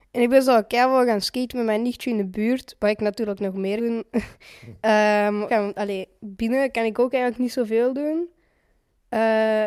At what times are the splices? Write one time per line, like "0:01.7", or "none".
0:03.8
0:05.5